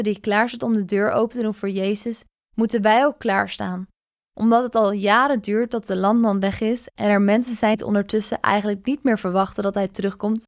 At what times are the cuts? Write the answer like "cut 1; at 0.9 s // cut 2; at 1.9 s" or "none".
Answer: cut 1; at 7.7 s